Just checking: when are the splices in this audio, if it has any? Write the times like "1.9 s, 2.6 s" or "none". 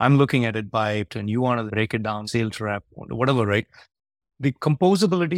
1.1 s, 1.7 s, 2.2 s